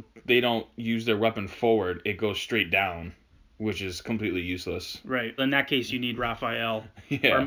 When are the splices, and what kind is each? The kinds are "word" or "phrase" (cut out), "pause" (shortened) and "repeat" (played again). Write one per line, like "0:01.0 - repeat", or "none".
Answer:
0:05.4 - word